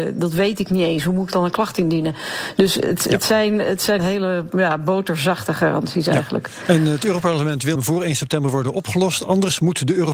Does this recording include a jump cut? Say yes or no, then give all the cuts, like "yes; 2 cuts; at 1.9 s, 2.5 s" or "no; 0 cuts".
yes; 2 cuts; at 4.0 s, 7.7 s